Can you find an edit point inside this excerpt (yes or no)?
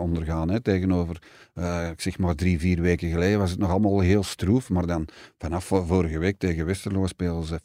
no